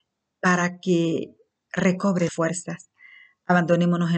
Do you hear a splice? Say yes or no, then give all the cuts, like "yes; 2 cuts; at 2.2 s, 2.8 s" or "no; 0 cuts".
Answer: yes; 1 cut; at 2.3 s